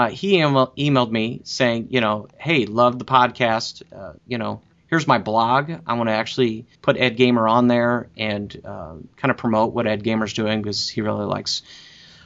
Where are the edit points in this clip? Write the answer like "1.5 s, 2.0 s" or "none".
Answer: 2.3 s, 4.2 s, 6.8 s, 9.1 s

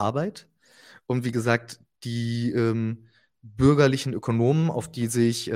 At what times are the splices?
none

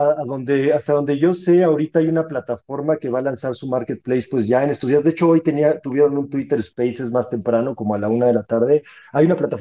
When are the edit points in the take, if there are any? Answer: none

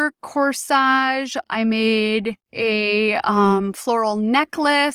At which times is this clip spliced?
2.4 s

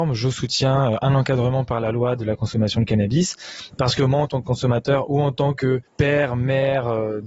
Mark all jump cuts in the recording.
5.9 s

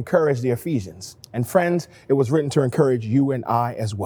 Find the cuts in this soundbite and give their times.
1.2 s

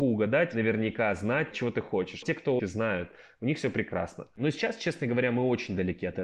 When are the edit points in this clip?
1.5 s, 2.2 s, 2.6 s

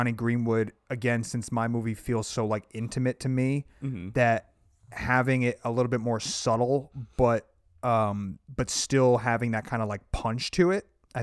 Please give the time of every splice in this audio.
none

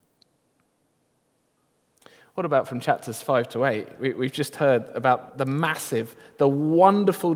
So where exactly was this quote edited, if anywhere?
5.3 s

